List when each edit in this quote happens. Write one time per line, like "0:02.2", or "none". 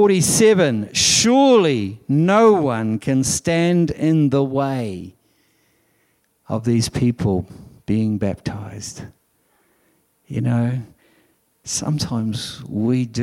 none